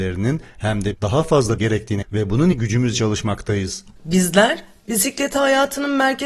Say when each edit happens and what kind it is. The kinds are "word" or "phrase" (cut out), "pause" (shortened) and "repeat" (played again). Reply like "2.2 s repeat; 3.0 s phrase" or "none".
0.9 s word; 1.6 s word; 2.0 s word; 2.5 s word; 2.9 s word